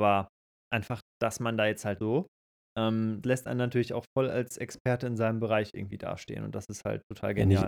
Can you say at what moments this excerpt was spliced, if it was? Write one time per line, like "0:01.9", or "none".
0:02.0
0:03.2